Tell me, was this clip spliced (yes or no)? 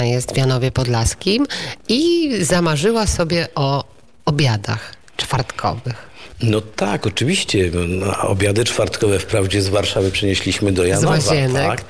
no